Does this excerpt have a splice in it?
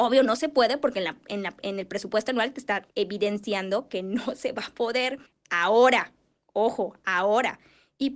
yes; 2 cuts; at 2.9 s, 5.3 s

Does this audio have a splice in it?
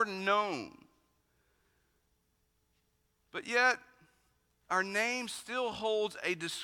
no; 0 cuts

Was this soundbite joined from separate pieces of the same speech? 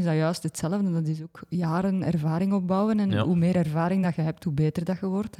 no; 0 cuts

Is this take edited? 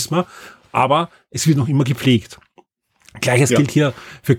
no; 0 cuts

